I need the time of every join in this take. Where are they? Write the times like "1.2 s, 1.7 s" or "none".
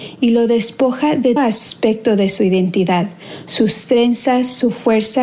1.4 s